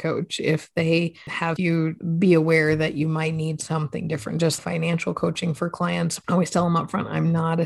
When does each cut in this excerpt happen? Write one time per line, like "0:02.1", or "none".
0:01.6
0:04.6